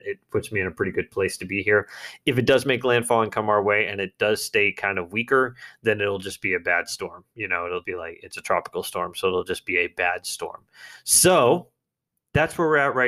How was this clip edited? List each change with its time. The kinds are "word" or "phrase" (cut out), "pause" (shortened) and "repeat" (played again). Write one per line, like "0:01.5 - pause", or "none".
0:07.8 - word